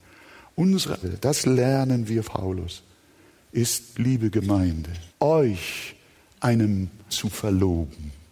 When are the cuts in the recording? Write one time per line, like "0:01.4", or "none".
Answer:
0:01.0
0:02.2
0:03.9
0:05.1
0:07.1